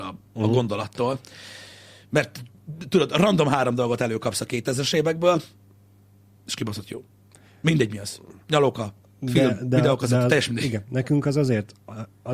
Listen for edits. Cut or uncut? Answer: uncut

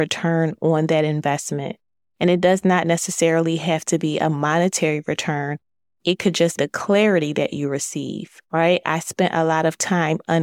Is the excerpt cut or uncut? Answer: cut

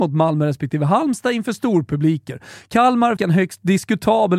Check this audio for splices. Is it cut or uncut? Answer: cut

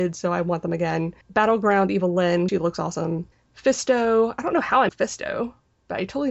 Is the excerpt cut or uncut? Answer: cut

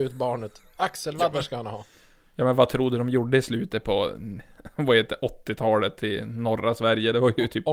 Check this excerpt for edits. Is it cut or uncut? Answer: uncut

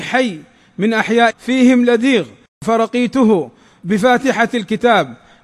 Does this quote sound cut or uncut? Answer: cut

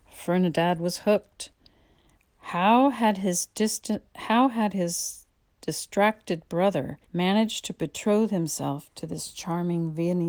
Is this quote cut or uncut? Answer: cut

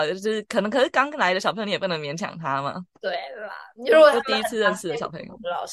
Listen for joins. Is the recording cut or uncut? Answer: cut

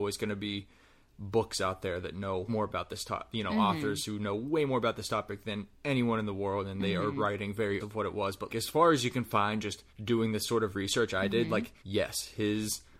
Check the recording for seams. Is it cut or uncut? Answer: cut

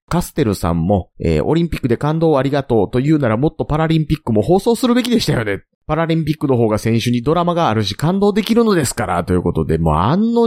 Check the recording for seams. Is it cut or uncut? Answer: cut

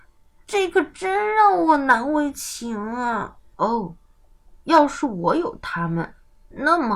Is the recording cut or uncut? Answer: cut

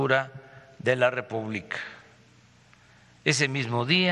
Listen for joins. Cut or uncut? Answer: uncut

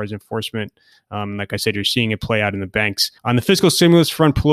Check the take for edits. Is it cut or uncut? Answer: cut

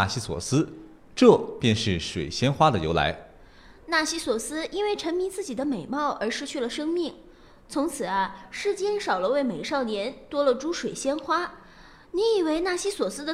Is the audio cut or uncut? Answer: uncut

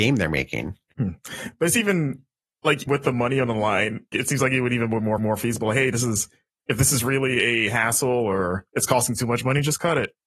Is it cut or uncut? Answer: cut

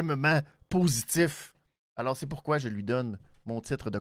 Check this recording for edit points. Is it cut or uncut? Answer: uncut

